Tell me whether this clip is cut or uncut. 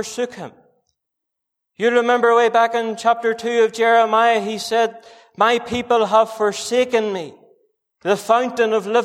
uncut